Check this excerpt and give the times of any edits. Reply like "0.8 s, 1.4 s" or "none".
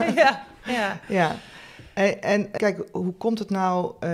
2.6 s